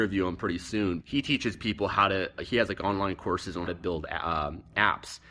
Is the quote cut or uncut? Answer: cut